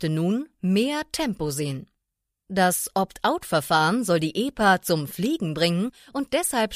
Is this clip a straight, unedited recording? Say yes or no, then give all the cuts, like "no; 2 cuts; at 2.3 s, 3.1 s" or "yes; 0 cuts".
yes; 0 cuts